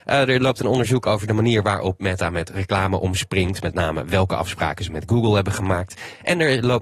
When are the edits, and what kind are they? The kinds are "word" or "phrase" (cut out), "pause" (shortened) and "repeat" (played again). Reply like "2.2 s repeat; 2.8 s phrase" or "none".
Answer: none

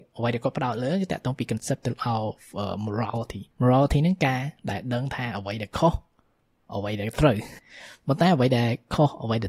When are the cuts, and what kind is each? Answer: 3.5 s pause

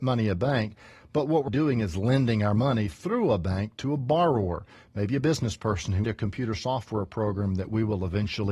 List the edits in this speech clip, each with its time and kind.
1.5 s word; 6.0 s phrase

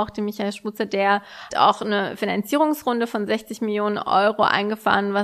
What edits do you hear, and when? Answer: 1.5 s word

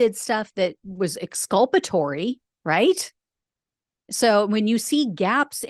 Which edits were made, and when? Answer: none

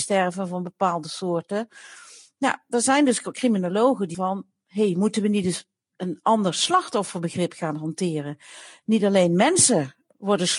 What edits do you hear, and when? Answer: 4.1 s word

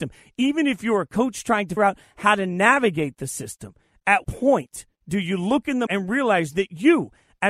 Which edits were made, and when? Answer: 1.8 s word; 4.2 s word; 5.0 s pause; 5.9 s word

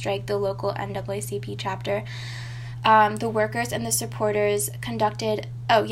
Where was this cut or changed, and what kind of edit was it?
none

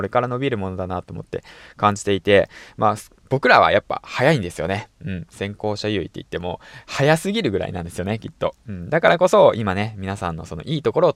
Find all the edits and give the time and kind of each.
none

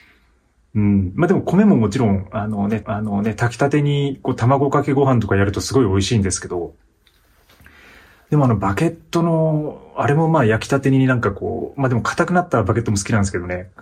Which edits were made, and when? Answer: 2.8 s repeat

